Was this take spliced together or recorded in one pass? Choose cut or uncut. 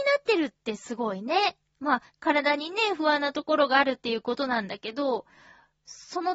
cut